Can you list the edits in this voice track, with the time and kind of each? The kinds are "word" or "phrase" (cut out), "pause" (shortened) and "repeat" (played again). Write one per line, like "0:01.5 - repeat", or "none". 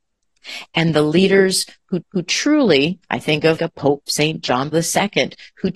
0:02.0 - repeat
0:03.6 - word
0:04.7 - word